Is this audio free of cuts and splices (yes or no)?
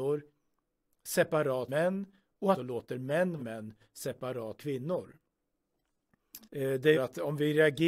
no